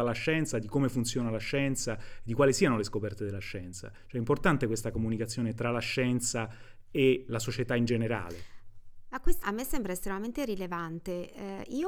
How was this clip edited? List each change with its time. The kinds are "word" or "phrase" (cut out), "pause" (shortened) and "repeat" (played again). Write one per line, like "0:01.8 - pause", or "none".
0:07.3 - word
0:09.4 - word